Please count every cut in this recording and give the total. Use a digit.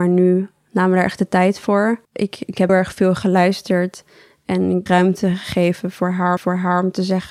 4